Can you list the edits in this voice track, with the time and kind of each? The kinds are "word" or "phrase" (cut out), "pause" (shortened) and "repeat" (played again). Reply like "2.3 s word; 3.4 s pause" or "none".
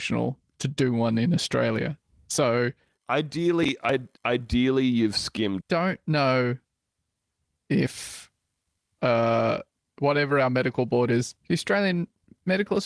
4.2 s pause; 5.6 s phrase